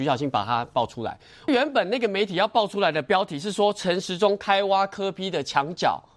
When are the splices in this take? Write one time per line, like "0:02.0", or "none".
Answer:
none